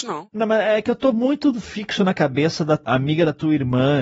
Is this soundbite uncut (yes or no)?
yes